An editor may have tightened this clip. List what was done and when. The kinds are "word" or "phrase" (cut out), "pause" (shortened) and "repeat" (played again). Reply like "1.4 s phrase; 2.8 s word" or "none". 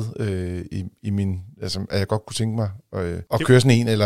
none